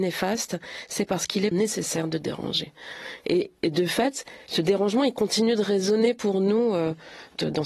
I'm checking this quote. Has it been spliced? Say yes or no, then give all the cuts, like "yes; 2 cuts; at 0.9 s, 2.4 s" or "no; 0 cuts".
yes; 1 cut; at 1.5 s